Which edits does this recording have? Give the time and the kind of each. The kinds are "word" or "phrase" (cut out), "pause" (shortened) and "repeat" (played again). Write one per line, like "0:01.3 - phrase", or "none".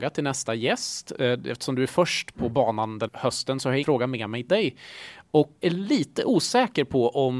0:02.3 - word
0:03.1 - word
0:03.8 - word
0:04.5 - word
0:05.6 - word